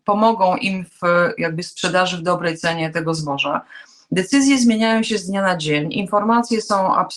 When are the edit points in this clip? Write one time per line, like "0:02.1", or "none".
none

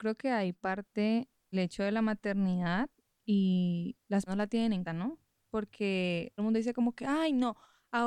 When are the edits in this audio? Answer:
0:01.5
0:04.3
0:04.9
0:06.4

